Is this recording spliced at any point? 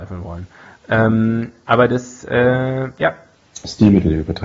no; 0 cuts

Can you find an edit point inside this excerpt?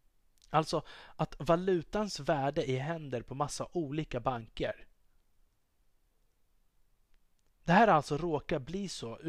no; 0 cuts

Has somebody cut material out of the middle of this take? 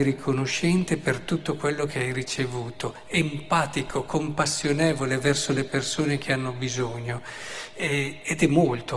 no; 0 cuts

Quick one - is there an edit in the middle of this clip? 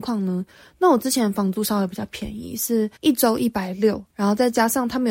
yes; 2 cuts; at 3.0 s, 4.1 s

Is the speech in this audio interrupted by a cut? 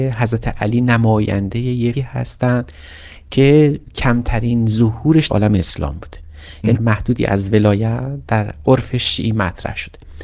yes; 3 cuts; at 1.9 s, 5.3 s, 6.7 s

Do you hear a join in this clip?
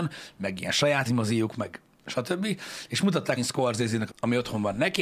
yes; 3 cuts; at 1.1 s, 3.4 s, 4.1 s

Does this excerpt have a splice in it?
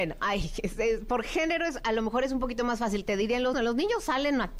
yes; 1 cut; at 3.5 s

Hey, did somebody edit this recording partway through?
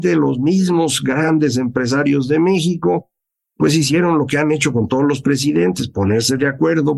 no; 0 cuts

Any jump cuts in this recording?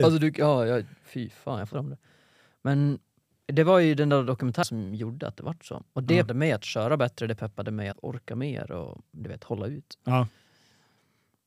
yes; 3 cuts; at 1.7 s, 6.3 s, 7.9 s

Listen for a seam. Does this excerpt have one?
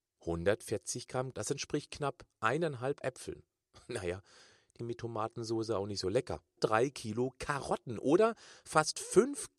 yes; 4 cuts; at 1.3 s, 3.0 s, 4.8 s, 6.6 s

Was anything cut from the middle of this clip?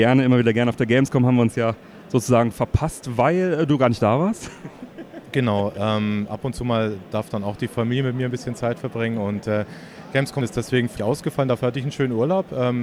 yes; 1 cut; at 11.0 s

